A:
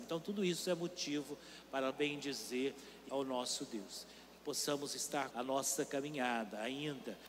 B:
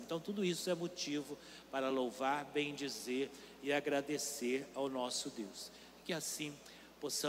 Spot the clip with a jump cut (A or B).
A